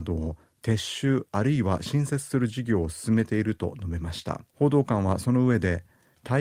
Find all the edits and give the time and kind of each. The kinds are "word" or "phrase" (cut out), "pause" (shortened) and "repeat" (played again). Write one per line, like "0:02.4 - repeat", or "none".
0:04.5 - pause